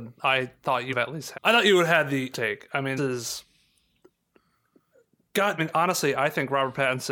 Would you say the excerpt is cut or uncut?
cut